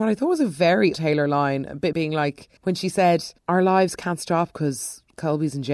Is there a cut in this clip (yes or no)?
yes